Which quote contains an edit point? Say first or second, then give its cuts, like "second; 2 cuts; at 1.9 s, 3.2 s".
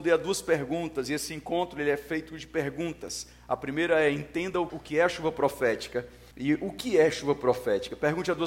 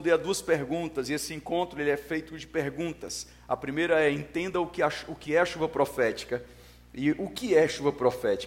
first; 2 cuts; at 4.7 s, 6.3 s